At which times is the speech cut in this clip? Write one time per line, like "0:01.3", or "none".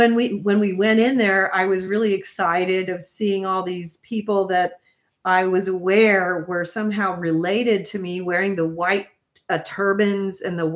none